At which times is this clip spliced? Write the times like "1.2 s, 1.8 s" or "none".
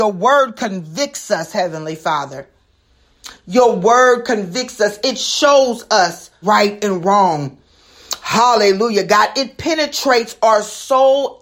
6.4 s